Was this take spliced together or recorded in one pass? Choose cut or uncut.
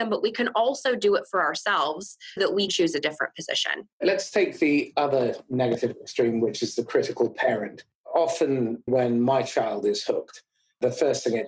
cut